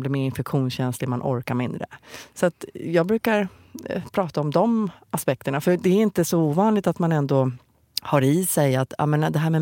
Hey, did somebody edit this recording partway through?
no; 0 cuts

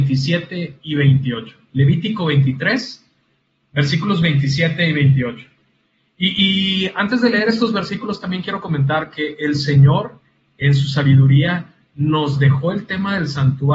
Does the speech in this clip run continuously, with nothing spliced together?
yes; 0 cuts

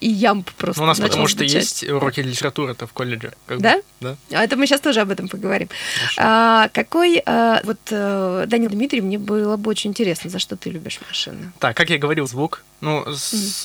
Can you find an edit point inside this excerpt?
yes; 4 cuts; at 7.6 s, 8.7 s, 11.7 s, 12.3 s

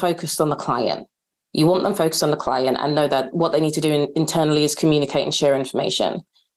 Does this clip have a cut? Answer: no; 0 cuts

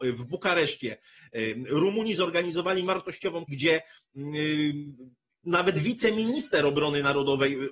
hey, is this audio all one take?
no; 2 cuts; at 2.9 s, 3.5 s

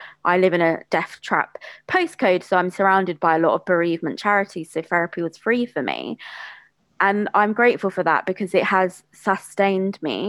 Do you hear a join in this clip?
no; 0 cuts

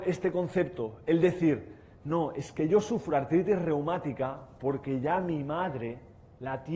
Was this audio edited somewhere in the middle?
no; 0 cuts

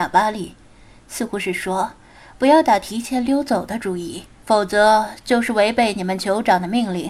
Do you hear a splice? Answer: yes; 1 cut; at 4.4 s

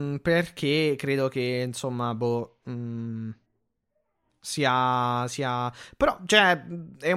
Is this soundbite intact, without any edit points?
yes; 0 cuts

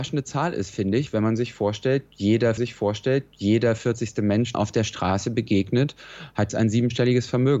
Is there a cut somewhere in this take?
yes; 3 cuts; at 2.6 s, 4.5 s, 6.5 s

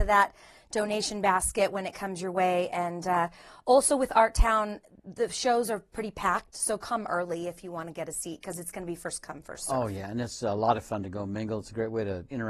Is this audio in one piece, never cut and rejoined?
yes; 0 cuts

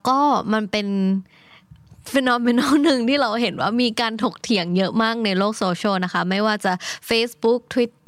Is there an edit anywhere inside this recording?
no; 0 cuts

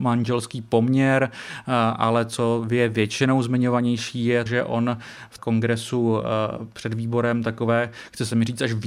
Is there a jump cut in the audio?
yes; 2 cuts; at 4.5 s, 5.4 s

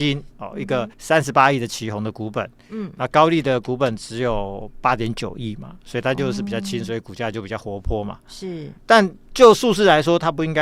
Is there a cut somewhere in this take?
yes; 2 cuts; at 0.9 s, 8.8 s

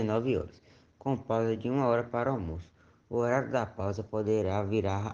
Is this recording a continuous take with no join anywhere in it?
yes; 0 cuts

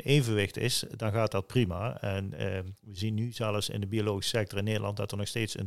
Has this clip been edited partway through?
no; 0 cuts

